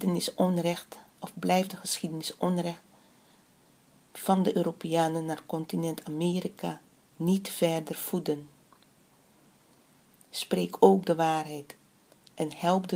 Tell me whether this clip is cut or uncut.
uncut